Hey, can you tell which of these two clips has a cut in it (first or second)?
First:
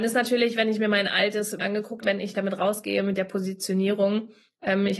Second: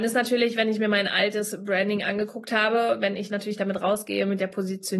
first